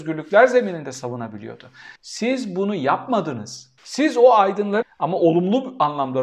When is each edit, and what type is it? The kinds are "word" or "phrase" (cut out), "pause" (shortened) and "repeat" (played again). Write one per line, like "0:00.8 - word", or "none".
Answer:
0:02.0 - pause
0:03.8 - pause
0:04.8 - phrase